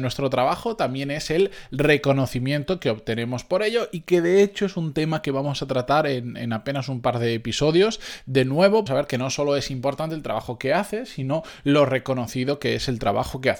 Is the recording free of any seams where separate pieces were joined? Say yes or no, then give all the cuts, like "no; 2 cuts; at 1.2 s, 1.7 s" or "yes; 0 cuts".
no; 1 cut; at 8.9 s